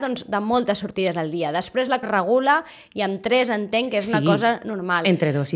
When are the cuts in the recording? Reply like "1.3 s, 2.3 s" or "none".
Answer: 2.0 s

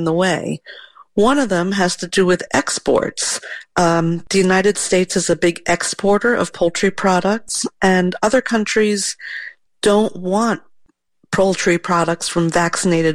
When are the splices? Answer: none

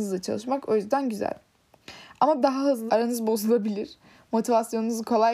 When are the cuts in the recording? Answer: 2.4 s, 2.9 s

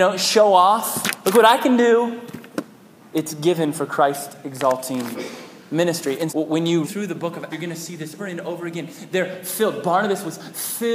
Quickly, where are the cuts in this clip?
3.0 s, 6.3 s, 6.8 s, 7.5 s, 8.2 s

